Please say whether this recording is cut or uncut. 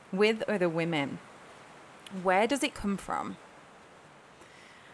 uncut